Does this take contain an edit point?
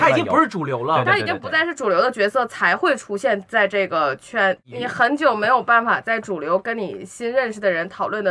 no; 0 cuts

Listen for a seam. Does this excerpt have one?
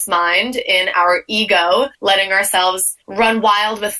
yes; 2 cuts; at 1.9 s, 3.0 s

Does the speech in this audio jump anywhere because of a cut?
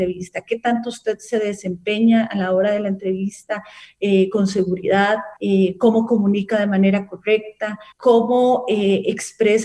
yes; 2 cuts; at 5.4 s, 7.9 s

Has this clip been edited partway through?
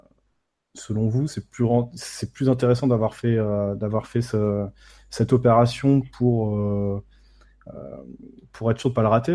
no; 0 cuts

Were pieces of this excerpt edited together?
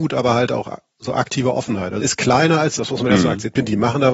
yes; 2 cuts; at 2.0 s, 2.8 s

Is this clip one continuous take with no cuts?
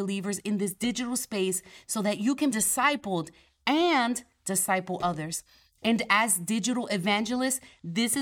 no; 1 cut; at 2.5 s

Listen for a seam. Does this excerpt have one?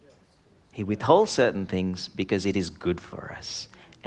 no; 0 cuts

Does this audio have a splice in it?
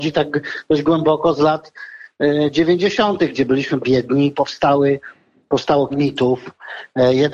yes; 2 cuts; at 3.8 s, 5.9 s

